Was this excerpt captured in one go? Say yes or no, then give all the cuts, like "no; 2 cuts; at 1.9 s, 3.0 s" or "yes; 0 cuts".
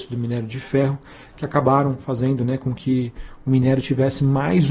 yes; 0 cuts